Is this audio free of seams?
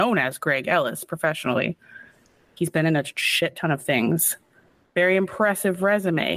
yes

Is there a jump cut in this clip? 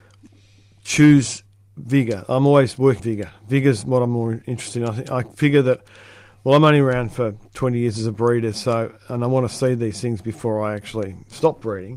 yes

